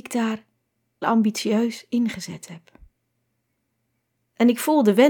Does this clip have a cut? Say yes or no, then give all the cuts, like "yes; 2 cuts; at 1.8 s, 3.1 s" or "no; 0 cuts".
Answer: yes; 1 cut; at 1.0 s